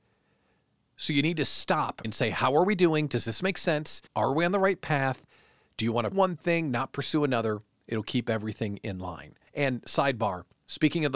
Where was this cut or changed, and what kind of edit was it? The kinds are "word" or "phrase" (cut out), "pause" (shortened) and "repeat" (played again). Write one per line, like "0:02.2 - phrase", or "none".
0:02.0 - word
0:04.1 - pause
0:06.1 - word
0:09.5 - pause